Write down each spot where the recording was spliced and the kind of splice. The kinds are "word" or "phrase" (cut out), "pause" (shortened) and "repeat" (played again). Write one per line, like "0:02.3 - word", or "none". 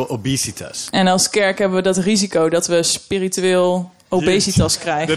none